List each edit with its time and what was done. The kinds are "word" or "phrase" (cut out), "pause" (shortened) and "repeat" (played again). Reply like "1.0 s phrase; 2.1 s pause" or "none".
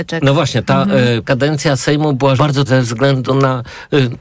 1.2 s word; 2.4 s word; 2.7 s word

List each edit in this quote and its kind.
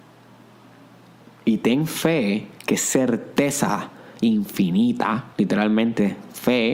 2.6 s pause; 5.3 s pause

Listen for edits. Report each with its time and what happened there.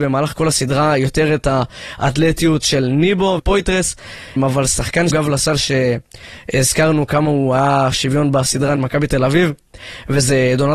2.6 s word; 3.4 s word; 4.4 s word; 5.1 s word; 7.9 s word; 8.8 s word

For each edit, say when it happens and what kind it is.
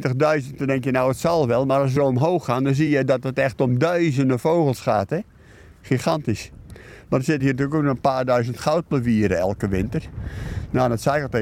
none

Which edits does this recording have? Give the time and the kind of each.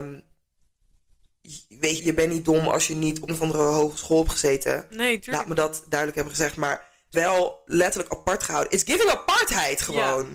2.0 s word; 3.3 s word; 7.1 s word

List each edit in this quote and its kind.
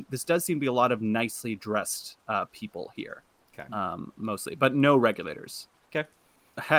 none

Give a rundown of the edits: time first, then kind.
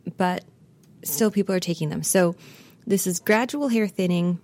none

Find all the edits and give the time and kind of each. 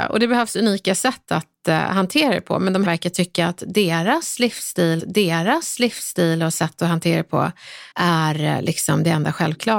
2.8 s phrase; 5.0 s repeat; 7.9 s pause

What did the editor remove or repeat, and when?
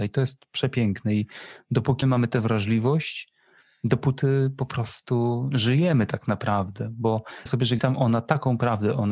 2.0 s word; 7.5 s word; 7.8 s word

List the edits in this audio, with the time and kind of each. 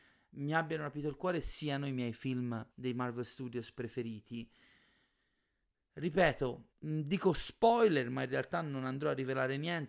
2.7 s pause; 6.7 s pause

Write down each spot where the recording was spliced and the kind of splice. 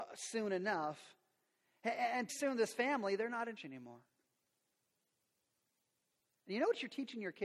2.3 s word; 3.6 s word

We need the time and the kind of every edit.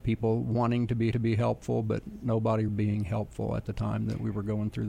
1.1 s repeat; 2.7 s word

